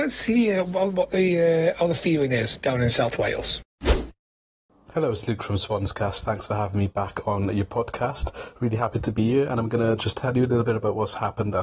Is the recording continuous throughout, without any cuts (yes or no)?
yes